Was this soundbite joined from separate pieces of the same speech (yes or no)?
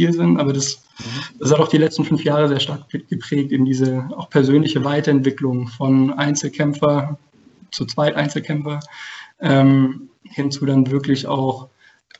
no